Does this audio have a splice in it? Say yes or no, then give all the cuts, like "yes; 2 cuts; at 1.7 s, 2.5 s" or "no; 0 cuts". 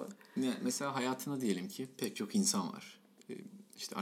no; 0 cuts